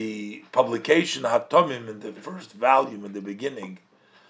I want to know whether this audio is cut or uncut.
uncut